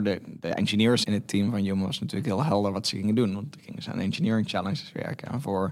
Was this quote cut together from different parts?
yes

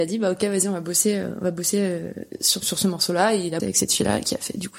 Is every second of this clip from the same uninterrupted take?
no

